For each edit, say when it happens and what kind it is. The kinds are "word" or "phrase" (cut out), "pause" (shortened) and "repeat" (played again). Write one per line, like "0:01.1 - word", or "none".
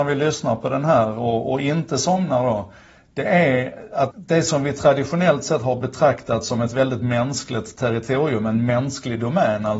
0:04.1 - word